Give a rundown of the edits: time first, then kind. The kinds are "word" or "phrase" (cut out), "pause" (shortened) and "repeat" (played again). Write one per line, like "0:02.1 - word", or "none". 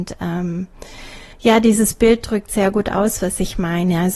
0:01.3 - pause